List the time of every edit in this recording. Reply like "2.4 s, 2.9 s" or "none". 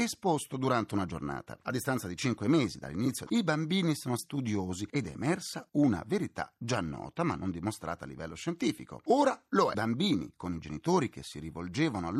3.3 s, 4.2 s, 9.7 s